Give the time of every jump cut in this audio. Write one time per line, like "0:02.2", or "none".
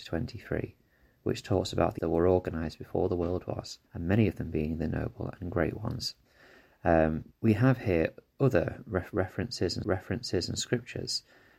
0:02.0
0:03.9
0:07.3
0:09.8